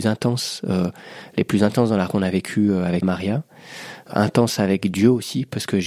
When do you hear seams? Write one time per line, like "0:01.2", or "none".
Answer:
0:02.1
0:03.0